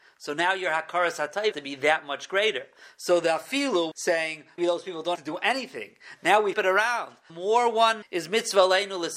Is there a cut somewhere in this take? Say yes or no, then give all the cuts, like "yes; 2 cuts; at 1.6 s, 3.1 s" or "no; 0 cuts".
yes; 7 cuts; at 1.5 s, 3.9 s, 4.6 s, 5.1 s, 6.5 s, 7.3 s, 8.0 s